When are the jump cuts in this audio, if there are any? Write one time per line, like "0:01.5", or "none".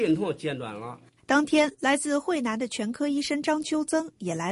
0:01.2